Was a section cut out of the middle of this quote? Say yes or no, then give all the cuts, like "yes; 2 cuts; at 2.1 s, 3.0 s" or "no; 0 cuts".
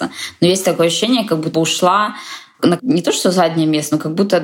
yes; 2 cuts; at 1.5 s, 2.8 s